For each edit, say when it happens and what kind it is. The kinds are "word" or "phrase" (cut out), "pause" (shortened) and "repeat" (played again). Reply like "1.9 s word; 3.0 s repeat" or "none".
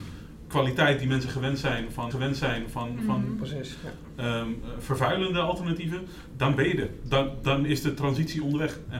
2.1 s repeat

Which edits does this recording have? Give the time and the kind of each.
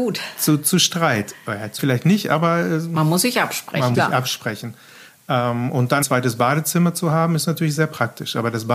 1.8 s word; 3.9 s word; 6.0 s word

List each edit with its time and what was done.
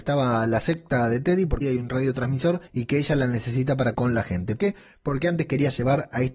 1.6 s word; 2.7 s pause; 3.9 s word; 4.6 s word

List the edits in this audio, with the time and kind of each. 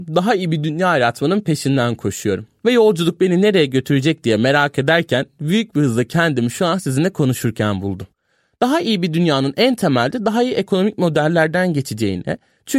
none

